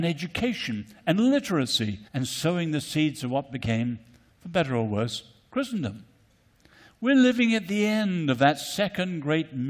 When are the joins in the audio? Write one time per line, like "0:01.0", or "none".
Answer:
0:02.1